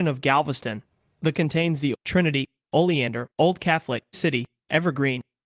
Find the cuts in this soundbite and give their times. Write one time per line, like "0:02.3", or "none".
0:01.3
0:01.9
0:03.3
0:04.1